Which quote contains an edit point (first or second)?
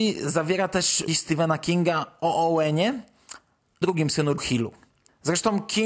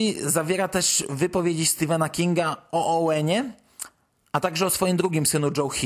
first